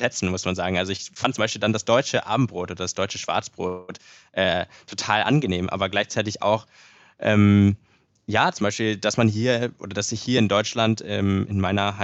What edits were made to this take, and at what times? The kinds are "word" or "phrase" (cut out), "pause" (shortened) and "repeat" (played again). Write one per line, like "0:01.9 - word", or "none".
none

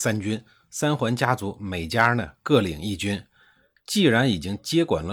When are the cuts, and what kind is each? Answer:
none

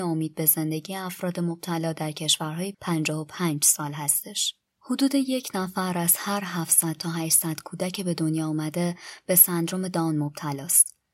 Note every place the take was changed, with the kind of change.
0:02.7 - word

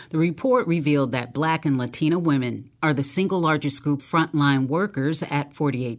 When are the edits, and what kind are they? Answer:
0:04.0 - word

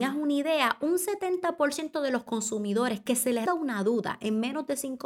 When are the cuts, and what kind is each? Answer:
0:03.5 - word

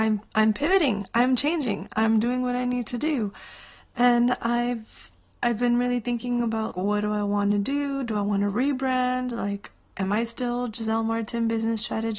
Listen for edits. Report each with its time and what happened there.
0:05.3 - word
0:06.7 - word

